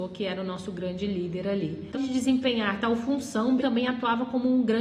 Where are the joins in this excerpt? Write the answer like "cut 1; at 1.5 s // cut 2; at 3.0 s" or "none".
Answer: cut 1; at 1.9 s // cut 2; at 3.6 s